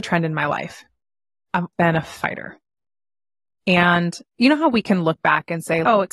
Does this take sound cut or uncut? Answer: cut